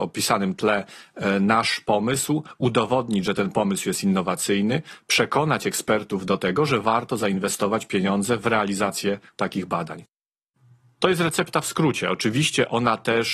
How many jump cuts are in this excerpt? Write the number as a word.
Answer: zero